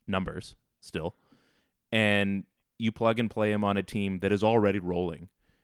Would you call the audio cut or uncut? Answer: uncut